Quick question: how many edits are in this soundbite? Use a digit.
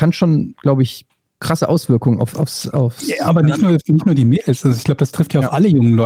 0